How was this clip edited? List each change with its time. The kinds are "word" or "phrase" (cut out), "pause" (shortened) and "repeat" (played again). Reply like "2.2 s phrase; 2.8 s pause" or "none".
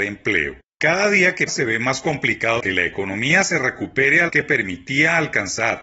1.5 s word; 2.6 s word; 4.3 s word